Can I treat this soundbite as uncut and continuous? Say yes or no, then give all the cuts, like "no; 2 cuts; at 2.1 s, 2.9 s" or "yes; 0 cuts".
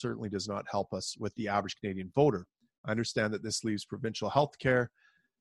yes; 0 cuts